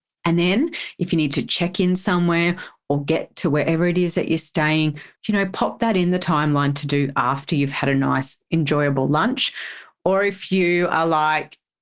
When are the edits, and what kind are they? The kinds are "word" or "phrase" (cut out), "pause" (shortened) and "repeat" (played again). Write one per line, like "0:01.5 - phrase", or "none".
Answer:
0:05.2 - pause